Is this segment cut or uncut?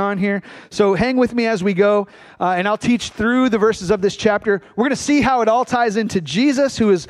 uncut